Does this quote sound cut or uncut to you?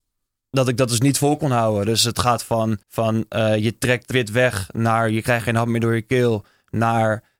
cut